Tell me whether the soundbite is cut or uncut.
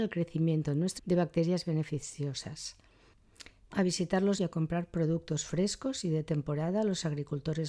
cut